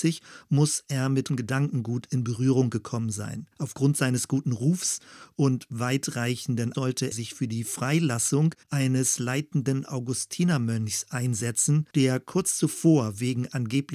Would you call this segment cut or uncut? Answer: cut